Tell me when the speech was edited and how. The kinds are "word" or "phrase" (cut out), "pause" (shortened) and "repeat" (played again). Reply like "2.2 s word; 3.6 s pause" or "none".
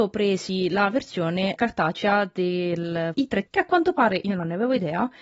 1.6 s word; 3.1 s word; 3.5 s word